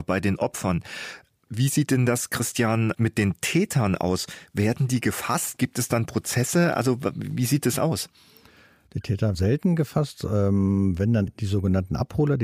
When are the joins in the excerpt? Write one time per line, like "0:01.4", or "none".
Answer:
0:03.0
0:05.6
0:09.3
0:11.3

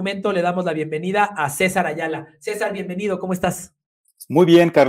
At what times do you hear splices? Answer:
none

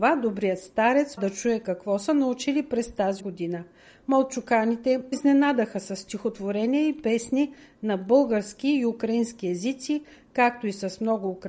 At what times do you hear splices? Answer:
0:01.2
0:03.2
0:05.1

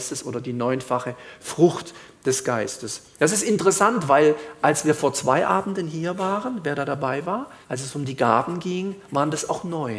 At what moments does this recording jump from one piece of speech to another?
0:07.6

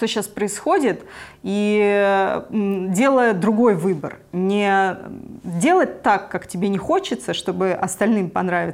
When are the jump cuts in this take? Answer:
none

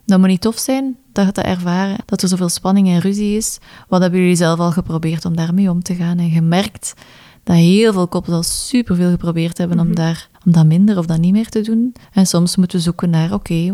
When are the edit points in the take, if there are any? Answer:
0:02.0
0:10.3
0:12.0

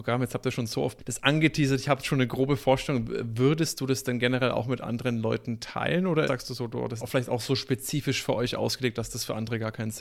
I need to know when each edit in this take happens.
0:01.0
0:06.3
0:07.0

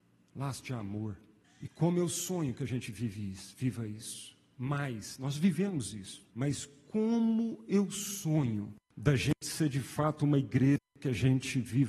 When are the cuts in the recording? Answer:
0:01.4
0:06.3
0:08.9

